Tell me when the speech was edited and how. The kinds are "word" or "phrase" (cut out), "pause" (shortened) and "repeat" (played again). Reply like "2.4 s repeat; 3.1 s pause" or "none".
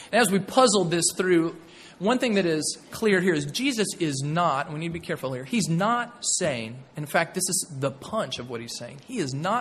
none